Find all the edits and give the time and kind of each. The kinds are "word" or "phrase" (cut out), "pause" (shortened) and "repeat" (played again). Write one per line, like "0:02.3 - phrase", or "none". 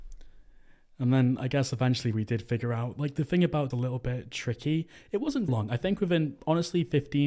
0:03.7 - phrase
0:05.5 - word